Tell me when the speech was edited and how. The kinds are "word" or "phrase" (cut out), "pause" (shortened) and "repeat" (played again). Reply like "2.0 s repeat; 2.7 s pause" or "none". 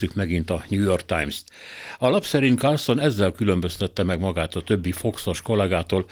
none